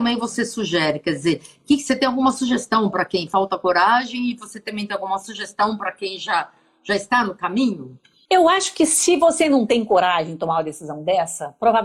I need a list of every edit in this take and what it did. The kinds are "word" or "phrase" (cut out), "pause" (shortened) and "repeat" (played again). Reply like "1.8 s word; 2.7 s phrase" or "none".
none